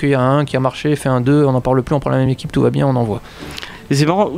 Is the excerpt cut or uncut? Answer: uncut